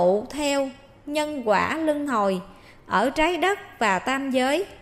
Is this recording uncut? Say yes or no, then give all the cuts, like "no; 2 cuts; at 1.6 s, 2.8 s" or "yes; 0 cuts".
yes; 0 cuts